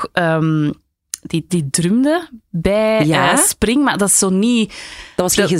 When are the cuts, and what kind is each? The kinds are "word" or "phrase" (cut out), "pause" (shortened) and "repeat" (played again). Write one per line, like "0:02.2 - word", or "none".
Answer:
0:01.5 - word